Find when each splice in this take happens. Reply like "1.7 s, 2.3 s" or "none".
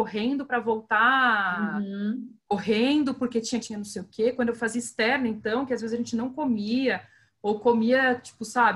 2.4 s, 3.6 s